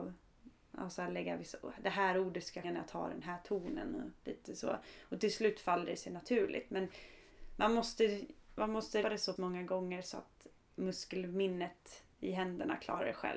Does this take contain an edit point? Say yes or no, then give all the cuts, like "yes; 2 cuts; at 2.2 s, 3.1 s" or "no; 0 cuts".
yes; 3 cuts; at 2.6 s, 9.0 s, 9.4 s